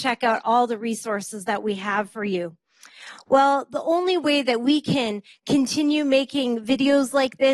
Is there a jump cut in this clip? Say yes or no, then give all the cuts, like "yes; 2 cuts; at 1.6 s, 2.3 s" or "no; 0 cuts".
no; 0 cuts